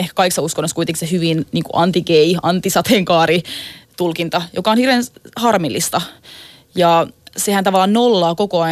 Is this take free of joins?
yes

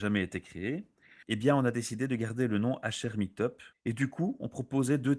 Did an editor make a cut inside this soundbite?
yes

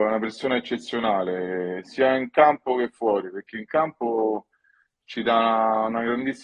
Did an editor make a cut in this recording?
no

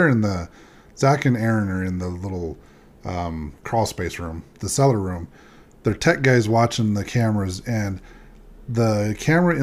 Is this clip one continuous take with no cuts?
no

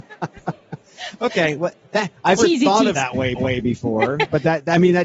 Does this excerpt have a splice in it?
yes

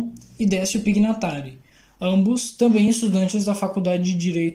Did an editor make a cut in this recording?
no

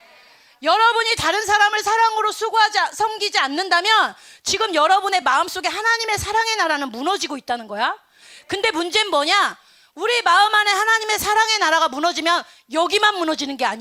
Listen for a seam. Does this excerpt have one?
no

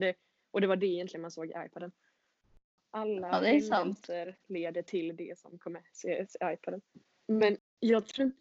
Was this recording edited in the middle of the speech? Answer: no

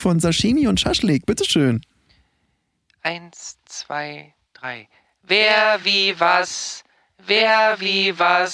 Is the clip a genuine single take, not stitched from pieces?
yes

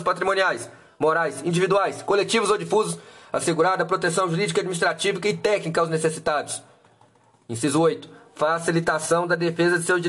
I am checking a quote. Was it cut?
no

